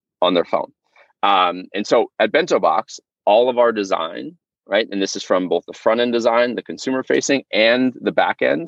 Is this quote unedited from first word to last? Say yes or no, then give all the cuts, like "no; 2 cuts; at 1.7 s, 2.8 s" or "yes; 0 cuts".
yes; 0 cuts